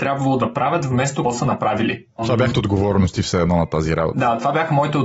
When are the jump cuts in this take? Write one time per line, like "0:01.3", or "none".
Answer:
0:01.2
0:02.5